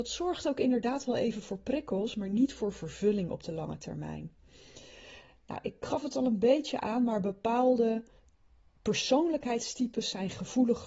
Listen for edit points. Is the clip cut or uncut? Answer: uncut